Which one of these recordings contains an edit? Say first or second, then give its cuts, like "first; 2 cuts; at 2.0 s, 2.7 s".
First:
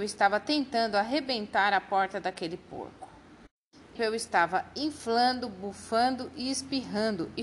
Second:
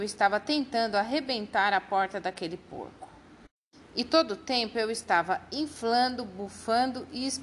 first; 1 cut; at 4.0 s